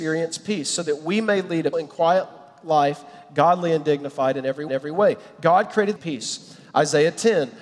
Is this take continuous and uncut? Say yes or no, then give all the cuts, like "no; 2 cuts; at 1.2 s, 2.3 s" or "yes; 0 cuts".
no; 3 cuts; at 1.7 s, 4.7 s, 6.0 s